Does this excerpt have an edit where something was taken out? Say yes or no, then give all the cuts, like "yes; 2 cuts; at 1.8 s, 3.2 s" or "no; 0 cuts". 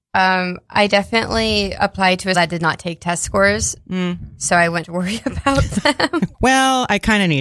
yes; 3 cuts; at 2.3 s, 4.8 s, 6.3 s